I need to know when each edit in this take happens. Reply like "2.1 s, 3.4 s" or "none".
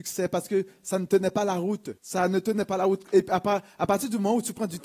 2.0 s